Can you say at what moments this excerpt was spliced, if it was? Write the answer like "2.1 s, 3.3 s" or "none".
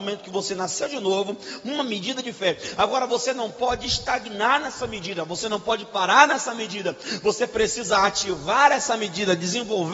none